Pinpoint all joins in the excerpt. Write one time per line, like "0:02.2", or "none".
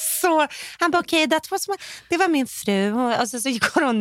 none